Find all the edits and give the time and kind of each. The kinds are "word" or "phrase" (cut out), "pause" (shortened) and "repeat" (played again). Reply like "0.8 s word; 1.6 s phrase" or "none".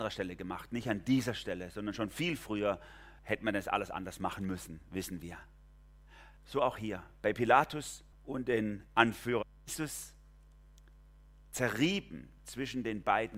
3.2 s pause; 6.4 s pause; 8.1 s pause; 9.6 s pause

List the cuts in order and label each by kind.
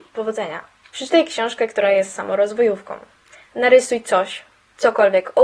none

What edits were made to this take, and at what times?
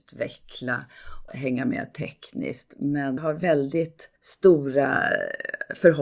1.3 s word; 3.2 s phrase; 4.2 s pause

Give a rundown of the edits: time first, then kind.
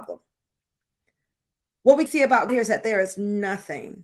2.1 s word; 2.5 s word

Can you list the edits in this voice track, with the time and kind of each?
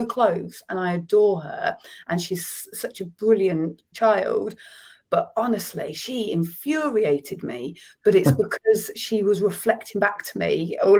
3.9 s word

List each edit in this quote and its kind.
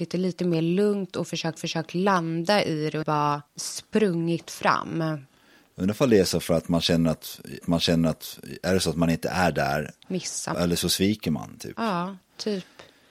1.6 s repeat; 3.0 s word; 3.5 s pause; 7.6 s repeat; 10.0 s word; 10.5 s word

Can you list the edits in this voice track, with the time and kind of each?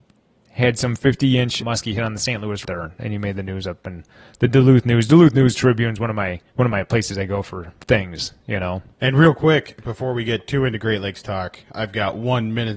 1.6 s word; 2.6 s phrase; 6.5 s pause; 8.9 s pause

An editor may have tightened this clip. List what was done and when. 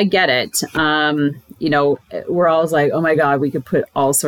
none

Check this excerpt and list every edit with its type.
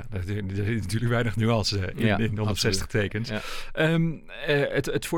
none

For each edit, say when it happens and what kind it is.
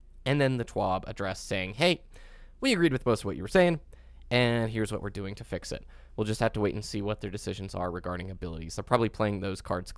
none

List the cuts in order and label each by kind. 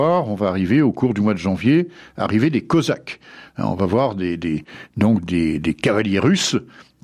none

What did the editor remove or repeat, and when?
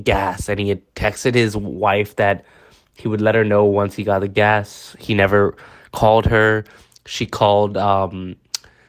none

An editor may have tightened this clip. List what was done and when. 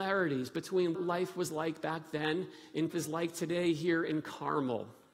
0.9 s word; 2.9 s phrase

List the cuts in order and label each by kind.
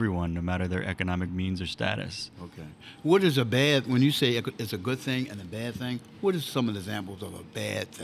none

